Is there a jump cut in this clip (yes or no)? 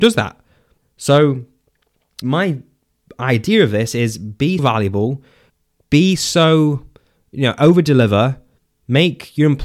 yes